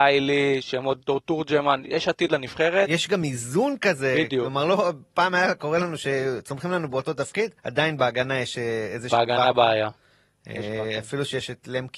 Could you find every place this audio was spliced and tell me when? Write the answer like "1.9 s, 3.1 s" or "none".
7.6 s